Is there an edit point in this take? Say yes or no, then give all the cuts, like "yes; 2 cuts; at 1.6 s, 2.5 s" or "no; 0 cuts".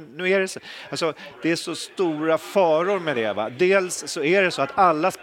no; 0 cuts